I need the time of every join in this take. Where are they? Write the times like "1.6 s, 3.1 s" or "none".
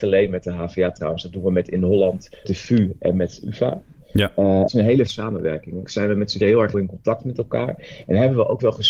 2.4 s, 4.7 s, 5.1 s, 5.9 s, 6.4 s, 6.7 s